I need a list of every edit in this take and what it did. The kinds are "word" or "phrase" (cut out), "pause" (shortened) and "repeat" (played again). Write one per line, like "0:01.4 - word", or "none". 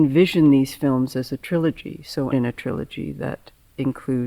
0:02.3 - phrase